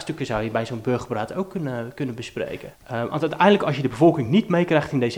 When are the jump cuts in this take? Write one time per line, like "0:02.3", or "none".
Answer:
none

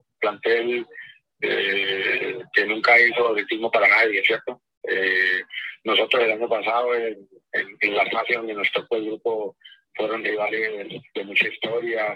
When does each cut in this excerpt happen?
none

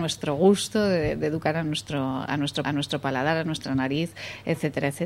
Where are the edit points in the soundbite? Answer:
0:02.6

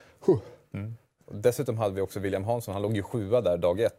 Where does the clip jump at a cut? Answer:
none

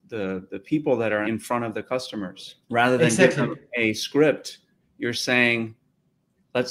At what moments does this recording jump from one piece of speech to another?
0:01.2
0:02.6
0:04.8

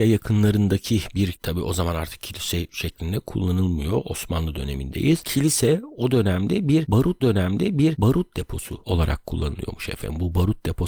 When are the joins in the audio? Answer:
0:01.3
0:07.2

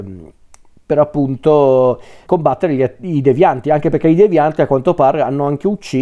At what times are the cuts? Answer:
0:02.2

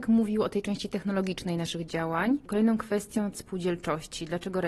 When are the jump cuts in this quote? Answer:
0:03.3

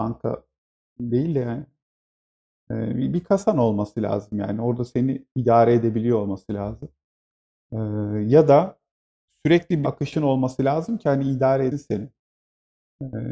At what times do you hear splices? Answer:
0:09.8
0:11.7

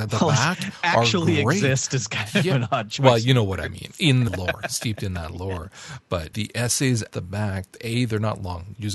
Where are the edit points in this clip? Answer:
0:04.3
0:06.3
0:07.1

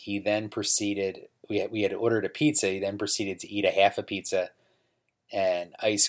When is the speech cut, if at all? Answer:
none

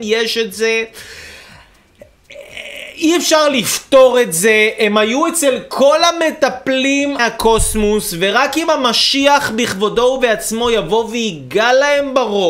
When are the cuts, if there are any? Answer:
0:07.2

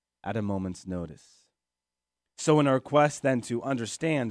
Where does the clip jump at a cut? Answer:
none

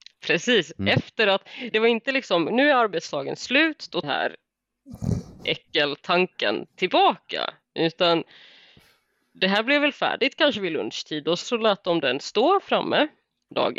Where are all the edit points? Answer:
0:01.7
0:04.0
0:11.4

